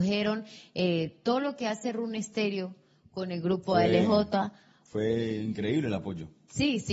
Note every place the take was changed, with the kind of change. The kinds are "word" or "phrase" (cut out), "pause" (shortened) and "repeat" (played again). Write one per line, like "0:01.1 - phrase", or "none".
none